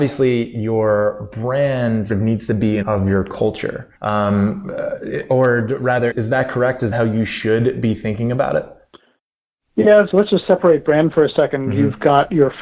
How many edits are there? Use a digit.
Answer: 6